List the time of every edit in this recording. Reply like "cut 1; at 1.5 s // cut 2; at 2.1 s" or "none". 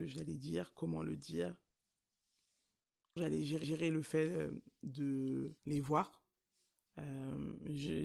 cut 1; at 3.2 s // cut 2; at 3.6 s // cut 3; at 5.6 s

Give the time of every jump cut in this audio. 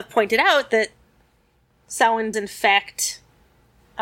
cut 1; at 2.3 s

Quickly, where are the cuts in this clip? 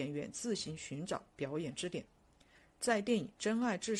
none

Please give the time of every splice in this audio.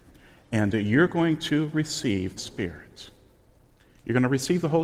cut 1; at 2.4 s

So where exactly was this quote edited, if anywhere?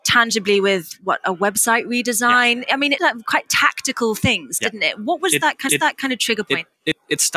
cut 1; at 3.0 s // cut 2; at 5.7 s

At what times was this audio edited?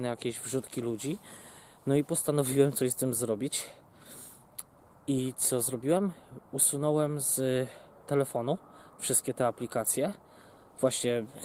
none

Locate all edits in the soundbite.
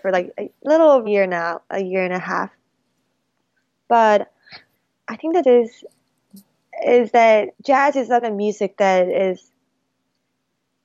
cut 1; at 1.1 s // cut 2; at 4.7 s // cut 3; at 5.4 s // cut 4; at 7.5 s // cut 5; at 8.2 s

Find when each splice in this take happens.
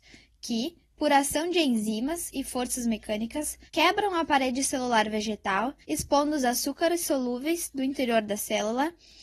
cut 1; at 3.7 s // cut 2; at 5.8 s

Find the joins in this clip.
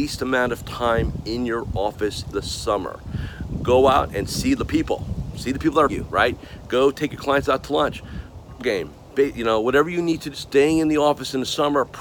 cut 1; at 2.3 s // cut 2; at 5.9 s // cut 3; at 8.6 s // cut 4; at 10.3 s

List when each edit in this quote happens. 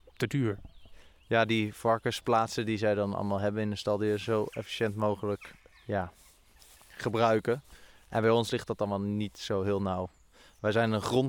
cut 1; at 5.7 s

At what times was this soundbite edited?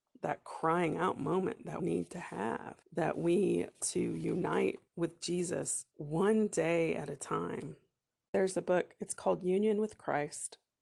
cut 1; at 1.8 s // cut 2; at 2.8 s // cut 3; at 3.8 s // cut 4; at 4.9 s // cut 5; at 5.9 s

